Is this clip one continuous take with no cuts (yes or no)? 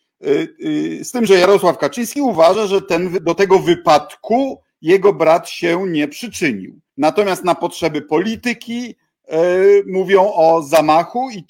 no